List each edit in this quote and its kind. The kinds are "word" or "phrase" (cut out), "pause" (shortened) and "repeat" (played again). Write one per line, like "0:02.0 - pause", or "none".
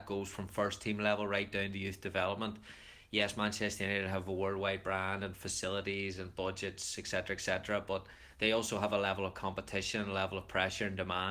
none